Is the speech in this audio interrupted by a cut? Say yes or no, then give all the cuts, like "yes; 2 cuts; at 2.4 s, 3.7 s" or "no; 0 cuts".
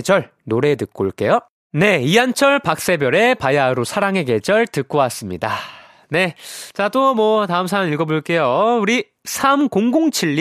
no; 0 cuts